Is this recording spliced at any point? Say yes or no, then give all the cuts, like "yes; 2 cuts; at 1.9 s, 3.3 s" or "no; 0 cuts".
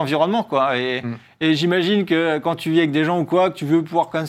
no; 0 cuts